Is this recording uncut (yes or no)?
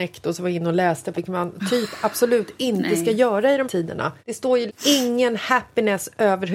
no